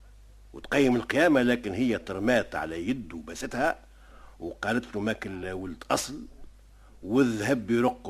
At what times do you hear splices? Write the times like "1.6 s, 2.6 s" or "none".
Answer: none